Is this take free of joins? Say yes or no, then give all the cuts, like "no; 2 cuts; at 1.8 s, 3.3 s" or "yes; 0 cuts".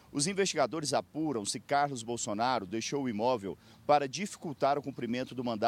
yes; 0 cuts